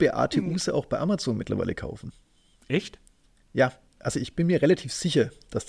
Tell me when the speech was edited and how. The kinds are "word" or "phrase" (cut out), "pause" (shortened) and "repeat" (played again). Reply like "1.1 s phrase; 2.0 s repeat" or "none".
none